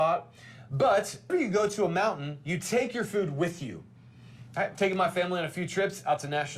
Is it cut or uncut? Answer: cut